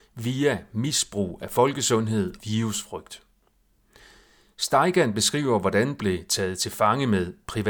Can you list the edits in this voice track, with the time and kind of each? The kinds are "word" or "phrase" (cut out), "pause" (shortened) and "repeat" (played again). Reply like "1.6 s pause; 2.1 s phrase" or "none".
2.4 s word; 6.0 s word